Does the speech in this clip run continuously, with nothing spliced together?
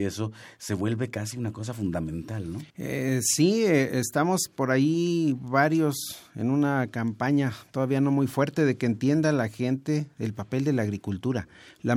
no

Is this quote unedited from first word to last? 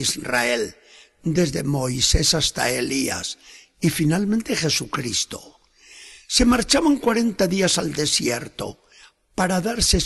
yes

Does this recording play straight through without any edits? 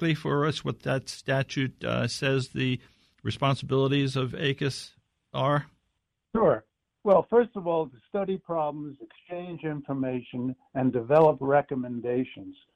yes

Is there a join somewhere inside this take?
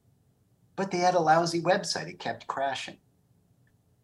no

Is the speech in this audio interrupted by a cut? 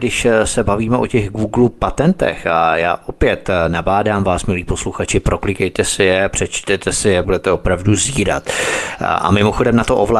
yes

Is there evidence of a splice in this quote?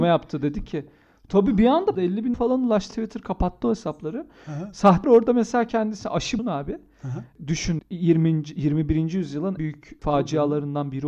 yes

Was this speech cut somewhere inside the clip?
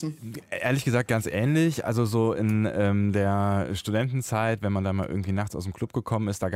no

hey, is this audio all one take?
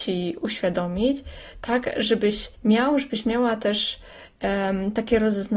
no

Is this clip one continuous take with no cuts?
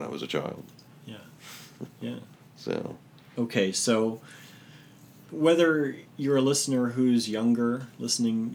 yes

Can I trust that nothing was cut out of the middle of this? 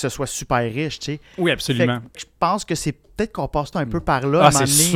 no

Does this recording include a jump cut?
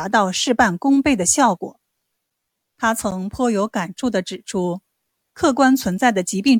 no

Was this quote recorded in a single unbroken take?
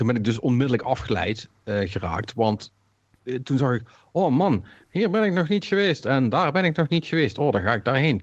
yes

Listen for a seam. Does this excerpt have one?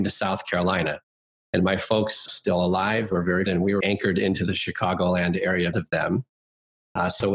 yes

